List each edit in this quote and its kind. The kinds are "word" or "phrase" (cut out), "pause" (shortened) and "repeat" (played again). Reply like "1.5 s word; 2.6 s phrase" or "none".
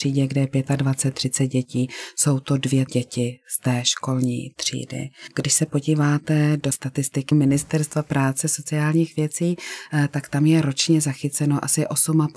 2.9 s word